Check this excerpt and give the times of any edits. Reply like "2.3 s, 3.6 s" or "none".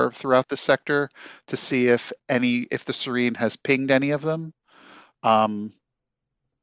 none